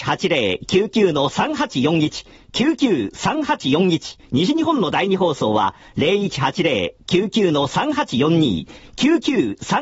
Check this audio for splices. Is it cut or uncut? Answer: cut